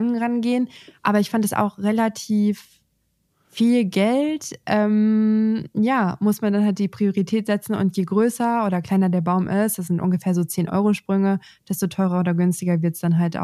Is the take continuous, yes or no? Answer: yes